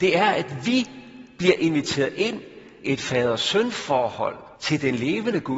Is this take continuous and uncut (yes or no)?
no